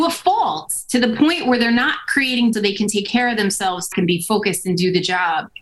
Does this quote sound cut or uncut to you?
cut